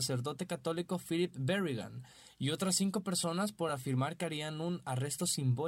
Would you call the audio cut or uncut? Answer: uncut